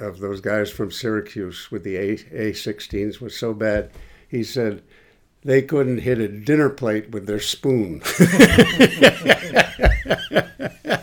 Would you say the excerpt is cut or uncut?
uncut